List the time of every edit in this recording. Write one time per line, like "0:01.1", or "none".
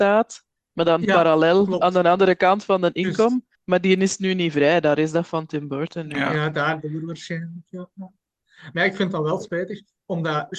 0:03.5